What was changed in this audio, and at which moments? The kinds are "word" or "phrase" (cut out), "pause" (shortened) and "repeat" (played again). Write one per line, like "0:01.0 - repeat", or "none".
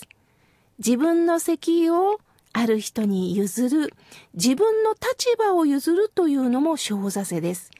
none